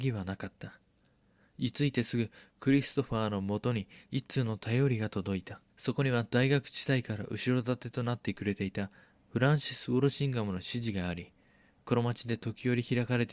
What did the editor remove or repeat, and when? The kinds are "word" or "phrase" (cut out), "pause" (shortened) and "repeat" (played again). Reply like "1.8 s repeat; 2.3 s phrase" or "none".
5.7 s pause